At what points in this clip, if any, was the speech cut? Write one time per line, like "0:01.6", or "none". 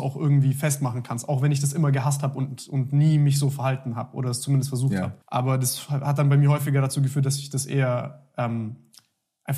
0:05.2